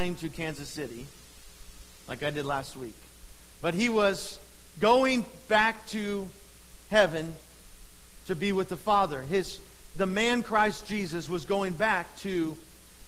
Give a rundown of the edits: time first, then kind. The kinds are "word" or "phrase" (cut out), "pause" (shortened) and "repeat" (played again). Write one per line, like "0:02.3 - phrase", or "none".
0:09.9 - word